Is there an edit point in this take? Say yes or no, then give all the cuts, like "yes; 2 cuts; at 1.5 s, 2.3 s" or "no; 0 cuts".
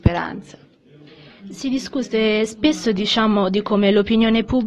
no; 0 cuts